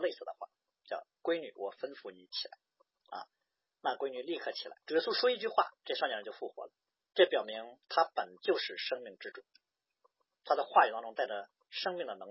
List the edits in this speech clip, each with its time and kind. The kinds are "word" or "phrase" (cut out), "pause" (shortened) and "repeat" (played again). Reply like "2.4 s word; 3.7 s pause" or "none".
4.8 s pause; 5.8 s pause; 6.9 s pause; 7.8 s pause